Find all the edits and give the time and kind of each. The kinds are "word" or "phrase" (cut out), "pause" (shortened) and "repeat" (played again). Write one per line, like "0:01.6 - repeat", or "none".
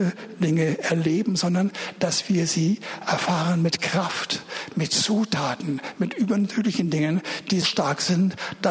0:07.6 - word